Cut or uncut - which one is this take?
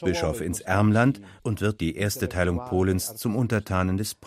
cut